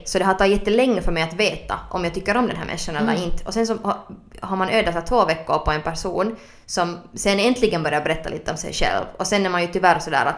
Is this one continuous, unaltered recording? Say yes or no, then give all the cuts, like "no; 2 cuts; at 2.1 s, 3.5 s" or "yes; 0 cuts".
yes; 0 cuts